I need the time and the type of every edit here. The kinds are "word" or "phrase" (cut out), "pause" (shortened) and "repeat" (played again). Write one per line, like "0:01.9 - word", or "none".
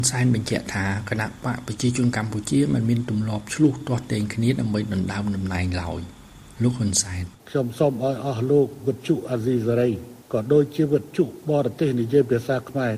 0:07.4 - pause
0:10.2 - pause